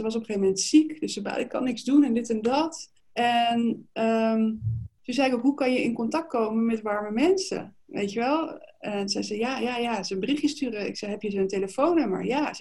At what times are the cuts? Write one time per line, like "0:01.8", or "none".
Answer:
0:03.0
0:04.9
0:08.7